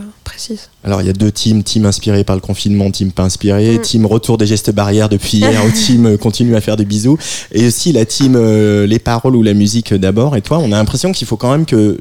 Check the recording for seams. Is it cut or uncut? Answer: uncut